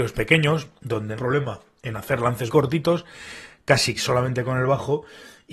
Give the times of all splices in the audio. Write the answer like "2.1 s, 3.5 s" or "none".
1.2 s, 2.5 s, 4.0 s

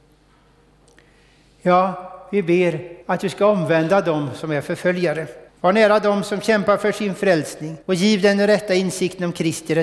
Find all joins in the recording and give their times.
3.0 s, 5.5 s, 7.8 s

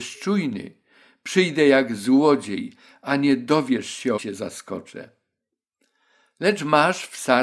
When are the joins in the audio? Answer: 4.2 s

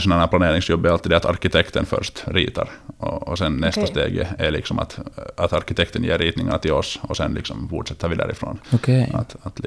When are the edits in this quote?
8.6 s

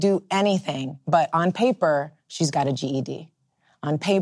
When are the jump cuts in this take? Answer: 2.2 s

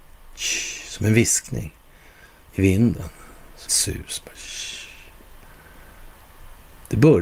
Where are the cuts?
3.7 s

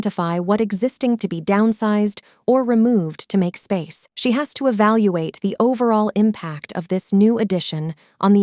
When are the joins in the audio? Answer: 1.2 s, 4.1 s

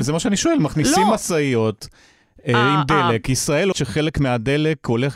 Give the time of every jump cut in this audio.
3.7 s

